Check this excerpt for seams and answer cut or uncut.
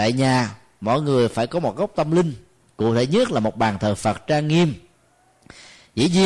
uncut